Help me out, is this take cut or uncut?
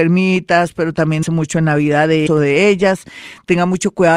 cut